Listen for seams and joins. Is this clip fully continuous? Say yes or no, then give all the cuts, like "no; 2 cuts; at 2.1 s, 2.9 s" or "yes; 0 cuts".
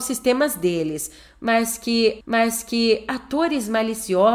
no; 1 cut; at 2.2 s